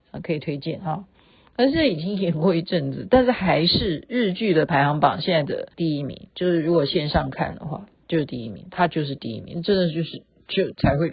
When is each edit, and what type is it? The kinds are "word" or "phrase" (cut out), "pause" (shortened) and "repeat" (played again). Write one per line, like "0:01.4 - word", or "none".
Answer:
0:05.7 - pause